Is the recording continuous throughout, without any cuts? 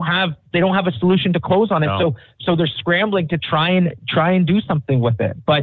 yes; 0 cuts

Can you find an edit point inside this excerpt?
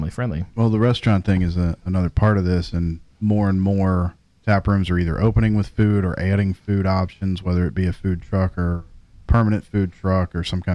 no; 0 cuts

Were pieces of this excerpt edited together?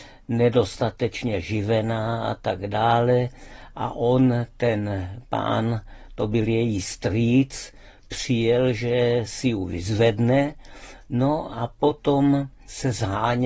no; 0 cuts

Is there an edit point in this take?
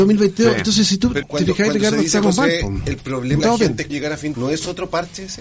yes; 4 cuts; at 1.2 s, 3.4 s, 3.9 s, 4.3 s

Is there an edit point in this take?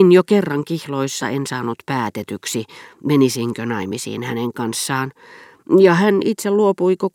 yes; 1 cut; at 1.2 s

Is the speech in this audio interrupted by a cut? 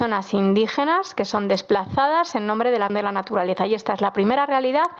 yes; 1 cut; at 2.9 s

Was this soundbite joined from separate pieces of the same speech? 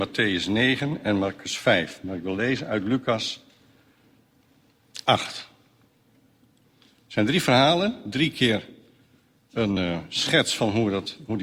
no; 0 cuts

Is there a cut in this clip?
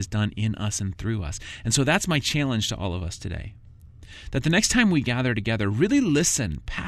no; 0 cuts

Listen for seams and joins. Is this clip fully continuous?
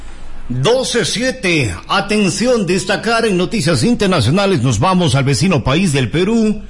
yes; 0 cuts

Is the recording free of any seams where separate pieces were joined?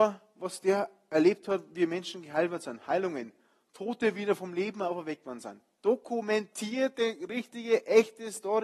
yes; 0 cuts

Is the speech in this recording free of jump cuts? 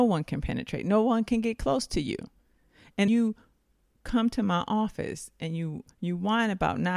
no; 2 cuts; at 3.1 s, 5.9 s

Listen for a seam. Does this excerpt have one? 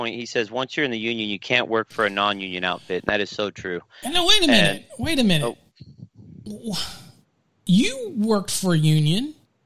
no; 0 cuts

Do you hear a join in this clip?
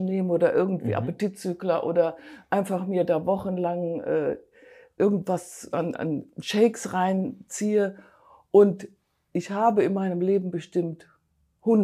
yes; 1 cut; at 5.9 s

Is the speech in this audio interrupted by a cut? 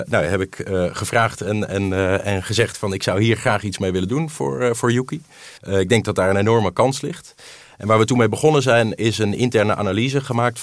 yes; 1 cut; at 5.6 s

